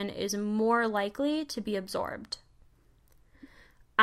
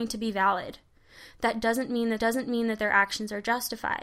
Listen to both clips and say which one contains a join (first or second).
second